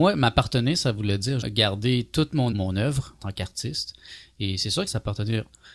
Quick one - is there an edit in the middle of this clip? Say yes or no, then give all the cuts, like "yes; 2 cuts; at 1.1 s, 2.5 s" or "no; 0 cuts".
yes; 4 cuts; at 1.4 s, 2.5 s, 3.2 s, 4.9 s